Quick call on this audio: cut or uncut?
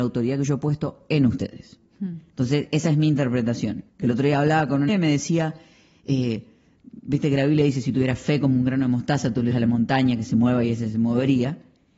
cut